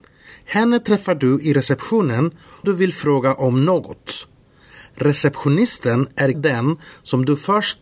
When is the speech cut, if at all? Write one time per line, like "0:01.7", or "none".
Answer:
0:02.6
0:06.3